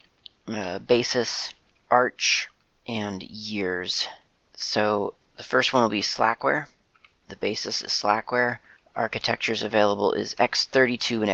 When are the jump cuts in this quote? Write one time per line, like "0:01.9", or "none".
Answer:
none